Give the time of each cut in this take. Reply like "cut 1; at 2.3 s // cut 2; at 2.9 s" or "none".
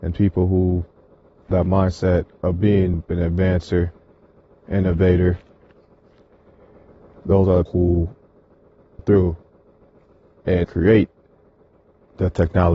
cut 1; at 1.5 s // cut 2; at 2.9 s // cut 3; at 7.7 s // cut 4; at 9.0 s // cut 5; at 10.6 s